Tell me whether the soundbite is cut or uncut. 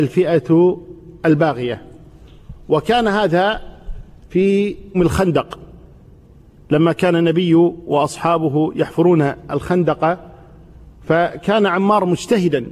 cut